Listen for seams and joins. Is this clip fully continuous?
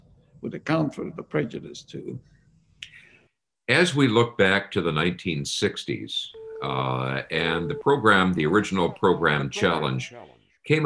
yes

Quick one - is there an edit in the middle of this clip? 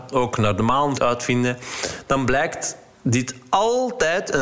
yes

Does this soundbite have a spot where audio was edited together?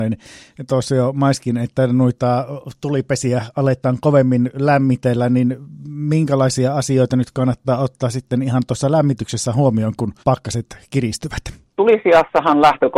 yes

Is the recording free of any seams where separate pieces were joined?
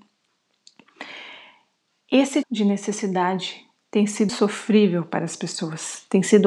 no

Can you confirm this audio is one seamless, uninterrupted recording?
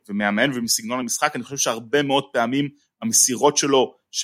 yes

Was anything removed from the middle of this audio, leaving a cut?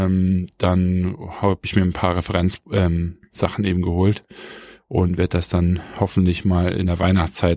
no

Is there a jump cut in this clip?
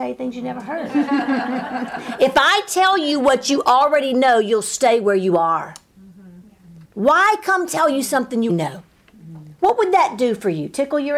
yes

